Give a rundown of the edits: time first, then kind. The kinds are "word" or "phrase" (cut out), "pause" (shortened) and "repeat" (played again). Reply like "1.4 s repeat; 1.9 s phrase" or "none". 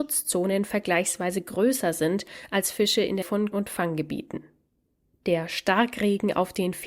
3.2 s word; 3.5 s word